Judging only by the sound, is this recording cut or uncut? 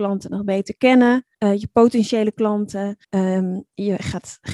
cut